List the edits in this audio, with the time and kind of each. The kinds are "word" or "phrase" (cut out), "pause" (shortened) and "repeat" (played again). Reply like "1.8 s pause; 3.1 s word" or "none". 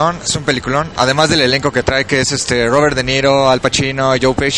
none